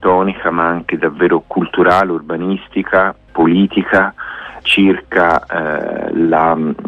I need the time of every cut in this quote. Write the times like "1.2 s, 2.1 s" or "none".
1.0 s, 3.3 s, 4.6 s